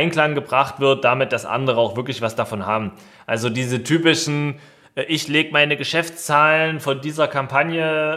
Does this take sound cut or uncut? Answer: uncut